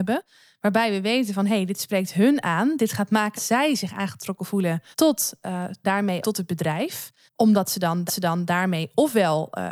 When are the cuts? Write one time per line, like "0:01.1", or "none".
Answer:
0:03.3
0:04.9
0:05.8
0:06.2
0:07.3
0:08.1